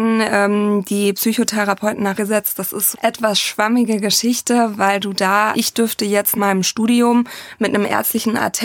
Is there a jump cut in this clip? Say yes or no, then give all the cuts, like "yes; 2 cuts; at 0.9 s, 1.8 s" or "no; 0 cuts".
yes; 4 cuts; at 2.2 s, 2.9 s, 5.5 s, 6.3 s